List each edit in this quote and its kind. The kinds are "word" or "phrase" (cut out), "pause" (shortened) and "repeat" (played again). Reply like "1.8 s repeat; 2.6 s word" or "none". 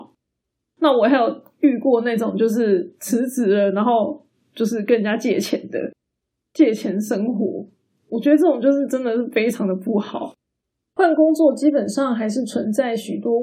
none